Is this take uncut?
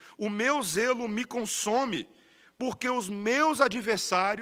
yes; 0 cuts

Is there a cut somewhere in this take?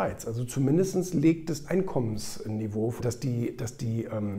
yes; 2 cuts; at 1.6 s, 3.0 s

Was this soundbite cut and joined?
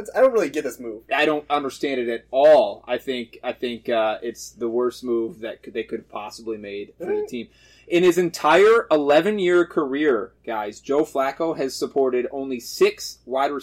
no; 0 cuts

